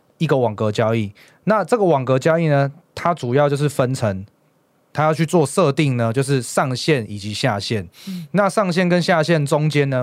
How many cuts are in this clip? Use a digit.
0